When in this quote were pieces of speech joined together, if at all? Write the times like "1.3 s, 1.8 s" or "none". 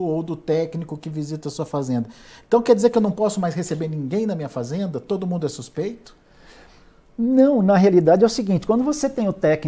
none